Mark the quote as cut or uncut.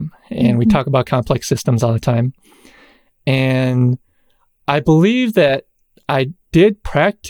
uncut